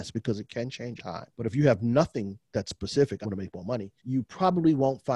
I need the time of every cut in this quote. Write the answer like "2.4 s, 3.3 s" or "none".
1.0 s, 1.3 s, 3.2 s, 4.0 s